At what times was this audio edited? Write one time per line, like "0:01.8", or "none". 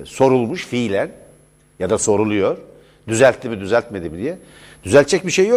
none